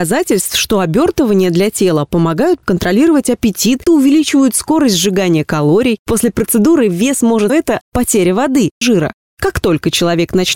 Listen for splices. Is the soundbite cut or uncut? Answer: cut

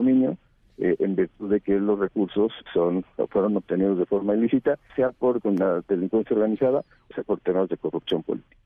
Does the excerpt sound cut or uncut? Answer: cut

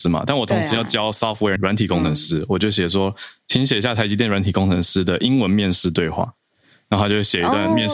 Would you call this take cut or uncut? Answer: cut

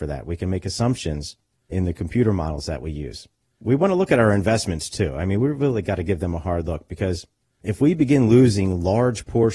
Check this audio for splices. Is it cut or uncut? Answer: uncut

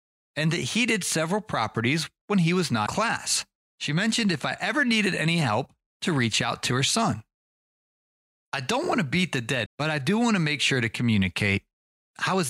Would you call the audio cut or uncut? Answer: cut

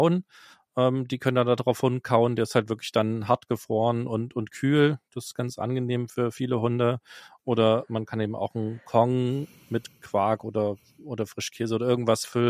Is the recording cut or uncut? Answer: uncut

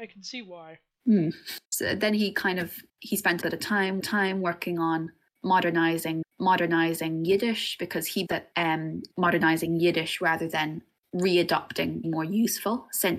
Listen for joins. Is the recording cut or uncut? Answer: cut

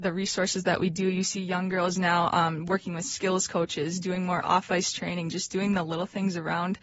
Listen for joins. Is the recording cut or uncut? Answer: uncut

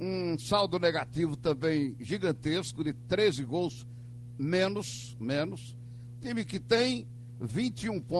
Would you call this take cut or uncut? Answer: uncut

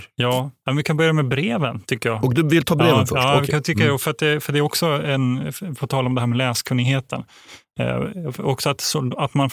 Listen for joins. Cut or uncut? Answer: uncut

